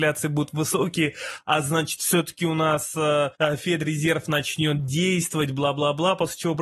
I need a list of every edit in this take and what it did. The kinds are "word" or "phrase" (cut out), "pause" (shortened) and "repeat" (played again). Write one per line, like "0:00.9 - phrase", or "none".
0:03.3 - pause